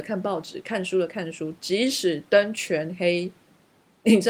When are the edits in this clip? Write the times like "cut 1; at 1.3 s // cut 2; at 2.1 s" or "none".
none